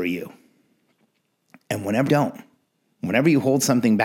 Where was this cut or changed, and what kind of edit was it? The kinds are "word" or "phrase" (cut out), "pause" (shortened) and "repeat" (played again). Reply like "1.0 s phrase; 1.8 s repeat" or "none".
2.1 s word